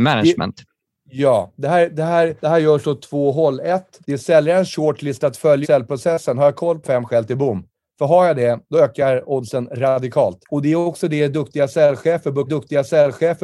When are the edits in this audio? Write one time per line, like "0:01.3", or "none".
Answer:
0:02.4
0:04.0
0:05.6
0:06.8
0:07.7
0:08.6
0:10.4
0:12.5